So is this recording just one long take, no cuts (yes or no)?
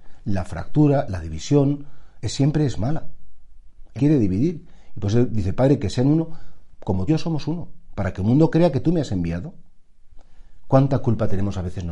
no